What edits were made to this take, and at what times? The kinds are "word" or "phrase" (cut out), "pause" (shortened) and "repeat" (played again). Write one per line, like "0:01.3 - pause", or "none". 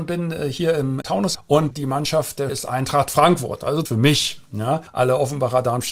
0:01.0 - word
0:01.3 - word
0:01.7 - word
0:02.5 - word
0:03.9 - word
0:04.9 - pause